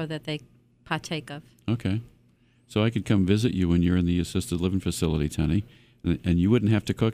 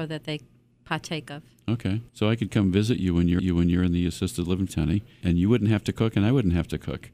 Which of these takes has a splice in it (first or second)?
second